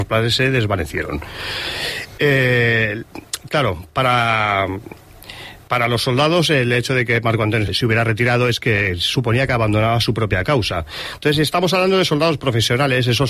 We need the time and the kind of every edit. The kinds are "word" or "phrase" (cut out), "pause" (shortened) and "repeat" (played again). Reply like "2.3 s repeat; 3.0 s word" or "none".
7.7 s word